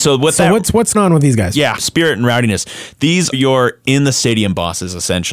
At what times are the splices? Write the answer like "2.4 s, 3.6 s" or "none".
0.9 s, 1.8 s, 3.3 s